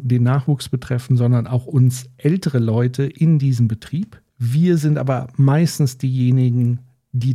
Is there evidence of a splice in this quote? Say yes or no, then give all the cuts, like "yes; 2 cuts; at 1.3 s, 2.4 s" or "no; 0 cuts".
yes; 1 cut; at 4.3 s